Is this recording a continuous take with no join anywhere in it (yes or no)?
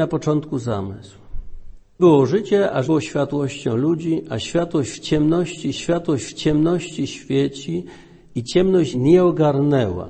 no